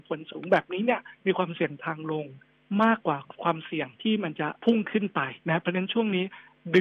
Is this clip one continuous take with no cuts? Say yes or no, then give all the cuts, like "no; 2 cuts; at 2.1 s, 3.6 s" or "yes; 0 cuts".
no; 4 cuts; at 1.2 s, 3.9 s, 4.6 s, 5.4 s